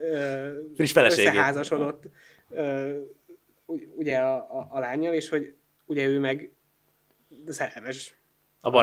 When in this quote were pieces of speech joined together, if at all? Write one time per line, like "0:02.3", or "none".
none